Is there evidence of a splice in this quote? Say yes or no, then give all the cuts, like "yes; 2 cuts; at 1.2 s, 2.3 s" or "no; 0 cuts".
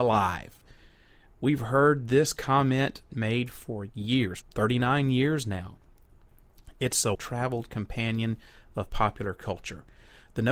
yes; 3 cuts; at 3.1 s, 4.4 s, 7.1 s